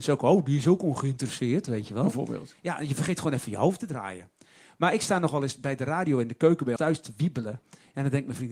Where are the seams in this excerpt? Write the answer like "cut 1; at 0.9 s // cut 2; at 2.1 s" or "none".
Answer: cut 1; at 6.8 s